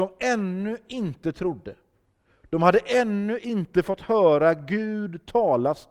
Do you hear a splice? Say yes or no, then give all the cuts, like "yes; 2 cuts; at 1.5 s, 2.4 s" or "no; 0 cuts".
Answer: no; 0 cuts